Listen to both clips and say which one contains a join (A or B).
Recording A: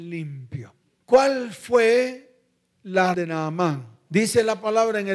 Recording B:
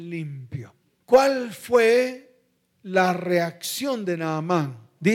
A